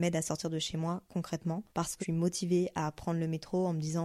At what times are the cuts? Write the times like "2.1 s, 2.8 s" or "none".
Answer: 1.7 s, 2.0 s